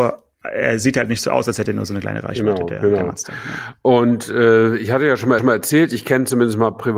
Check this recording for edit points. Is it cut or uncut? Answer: cut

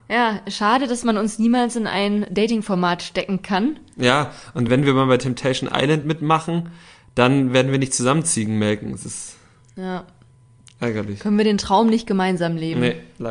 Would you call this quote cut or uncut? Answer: uncut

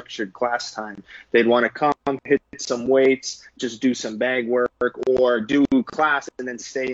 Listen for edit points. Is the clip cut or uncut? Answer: uncut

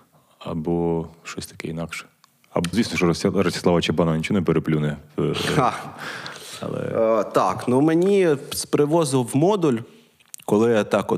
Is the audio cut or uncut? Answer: cut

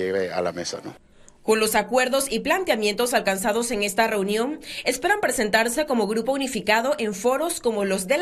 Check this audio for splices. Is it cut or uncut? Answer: uncut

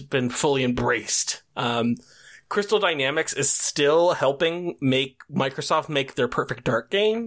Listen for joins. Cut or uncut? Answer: uncut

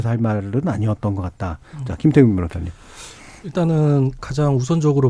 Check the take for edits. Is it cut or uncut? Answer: uncut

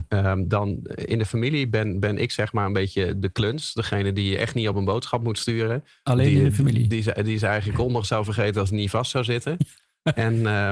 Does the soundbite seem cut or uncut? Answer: uncut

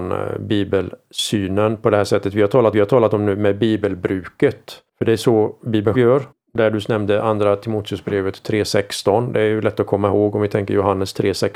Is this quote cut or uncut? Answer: cut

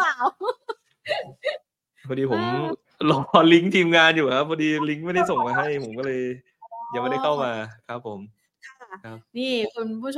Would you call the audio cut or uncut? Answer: uncut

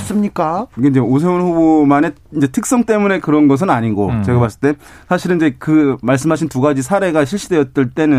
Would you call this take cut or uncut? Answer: uncut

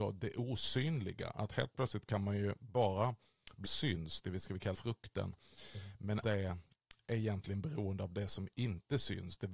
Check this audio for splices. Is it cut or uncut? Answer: cut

